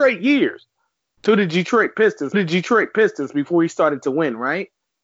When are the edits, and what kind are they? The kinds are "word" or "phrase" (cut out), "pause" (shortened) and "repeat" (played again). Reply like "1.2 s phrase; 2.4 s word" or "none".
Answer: 2.3 s repeat